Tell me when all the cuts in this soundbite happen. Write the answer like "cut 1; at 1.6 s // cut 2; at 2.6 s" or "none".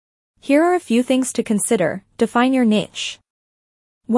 none

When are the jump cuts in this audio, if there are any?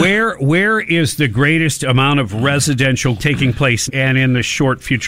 cut 1; at 3.2 s // cut 2; at 3.9 s

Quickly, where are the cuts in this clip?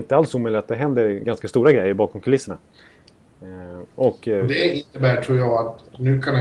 none

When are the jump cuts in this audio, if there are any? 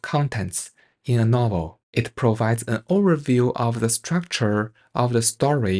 cut 1; at 1.8 s

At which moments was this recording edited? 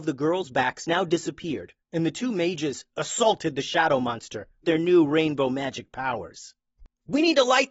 cut 1; at 1.8 s // cut 2; at 4.6 s

